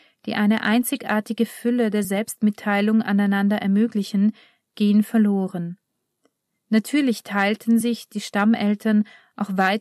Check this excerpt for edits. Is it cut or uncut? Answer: uncut